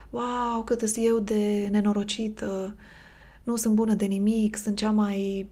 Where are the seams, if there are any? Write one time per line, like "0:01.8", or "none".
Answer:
none